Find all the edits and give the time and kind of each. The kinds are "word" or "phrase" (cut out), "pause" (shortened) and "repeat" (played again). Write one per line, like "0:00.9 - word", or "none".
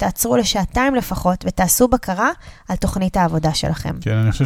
none

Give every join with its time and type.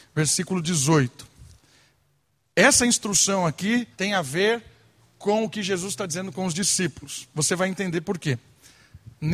0:03.9 - pause

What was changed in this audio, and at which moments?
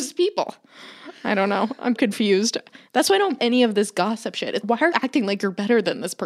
0:01.9 - word
0:03.4 - word
0:04.6 - word
0:04.9 - word

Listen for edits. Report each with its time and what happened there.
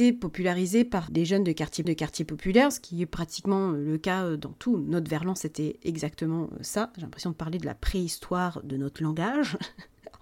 0:01.1 - word
0:01.8 - repeat

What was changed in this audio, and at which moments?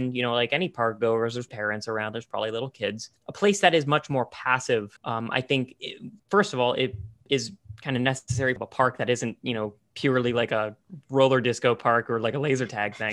0:01.5 - word
0:03.2 - pause
0:05.0 - pause
0:05.8 - phrase
0:06.2 - pause
0:08.6 - phrase

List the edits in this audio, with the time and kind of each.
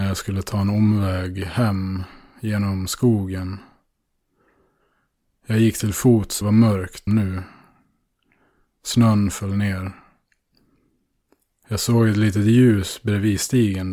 0:06.4 - word
0:07.1 - word

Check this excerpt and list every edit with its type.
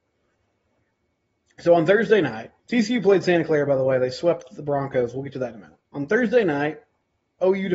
0:02.6 - pause
0:05.8 - pause

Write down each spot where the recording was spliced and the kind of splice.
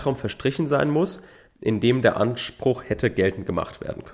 none

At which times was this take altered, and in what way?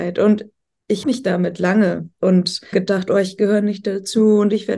0:01.0 - word
0:02.2 - word
0:02.7 - word

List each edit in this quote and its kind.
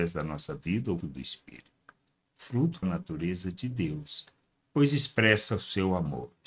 0:01.0 - word
0:02.8 - phrase

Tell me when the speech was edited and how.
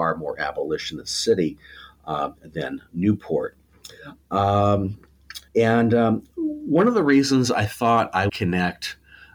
0:05.5 - pause
0:08.3 - word

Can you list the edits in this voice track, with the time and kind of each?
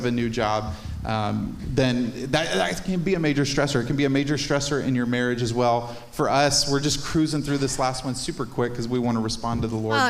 none

